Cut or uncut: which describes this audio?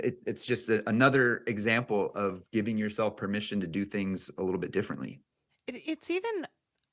uncut